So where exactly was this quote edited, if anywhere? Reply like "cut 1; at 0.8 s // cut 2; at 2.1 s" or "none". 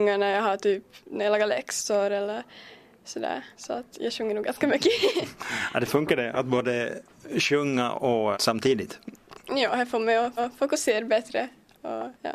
cut 1; at 3.5 s // cut 2; at 8.3 s // cut 3; at 10.4 s